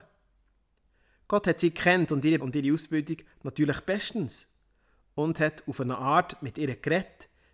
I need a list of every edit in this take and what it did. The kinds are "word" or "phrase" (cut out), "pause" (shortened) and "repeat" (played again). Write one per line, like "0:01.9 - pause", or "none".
0:02.4 - word